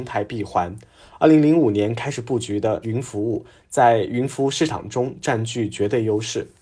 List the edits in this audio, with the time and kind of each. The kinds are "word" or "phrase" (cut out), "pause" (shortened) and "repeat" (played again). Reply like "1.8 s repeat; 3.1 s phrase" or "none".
2.8 s word